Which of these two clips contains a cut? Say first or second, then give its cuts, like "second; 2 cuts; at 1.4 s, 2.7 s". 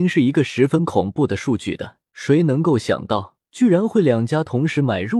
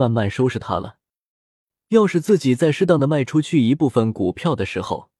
first; 2 cuts; at 2.1 s, 3.4 s